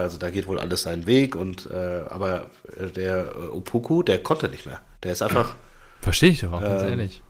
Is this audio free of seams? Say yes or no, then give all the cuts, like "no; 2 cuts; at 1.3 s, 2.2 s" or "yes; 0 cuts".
yes; 0 cuts